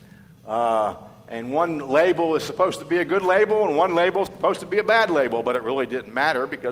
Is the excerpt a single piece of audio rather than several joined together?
yes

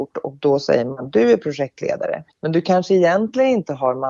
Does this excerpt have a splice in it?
yes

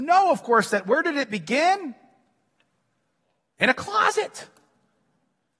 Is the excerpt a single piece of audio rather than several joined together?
yes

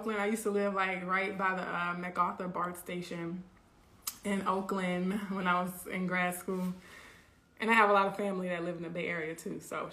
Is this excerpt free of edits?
yes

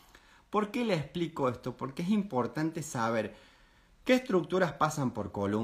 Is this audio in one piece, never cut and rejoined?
yes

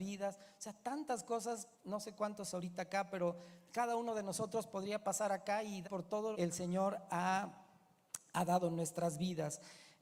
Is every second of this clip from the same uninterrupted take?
no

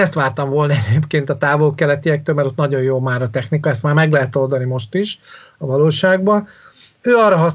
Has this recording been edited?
no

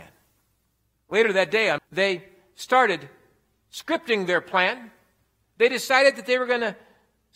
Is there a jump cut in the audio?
yes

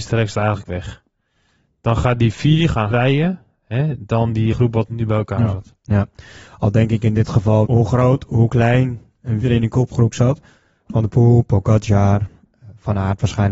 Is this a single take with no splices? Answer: no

